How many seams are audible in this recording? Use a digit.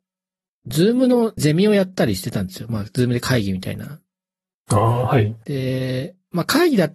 1